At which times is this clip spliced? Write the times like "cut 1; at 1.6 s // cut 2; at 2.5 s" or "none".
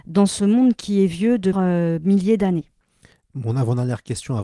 cut 1; at 1.5 s